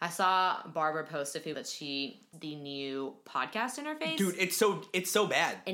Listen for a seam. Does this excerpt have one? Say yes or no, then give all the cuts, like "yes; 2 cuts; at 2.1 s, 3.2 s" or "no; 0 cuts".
yes; 2 cuts; at 1.5 s, 2.3 s